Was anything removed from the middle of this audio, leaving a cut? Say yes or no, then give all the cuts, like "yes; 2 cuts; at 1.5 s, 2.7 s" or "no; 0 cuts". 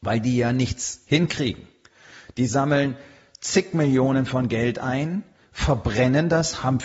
no; 0 cuts